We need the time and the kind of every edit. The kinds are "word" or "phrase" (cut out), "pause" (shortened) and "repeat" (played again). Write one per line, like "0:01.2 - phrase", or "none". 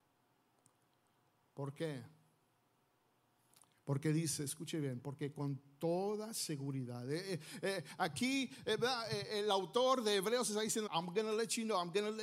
0:10.9 - phrase